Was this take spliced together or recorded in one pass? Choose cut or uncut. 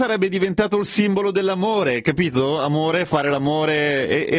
uncut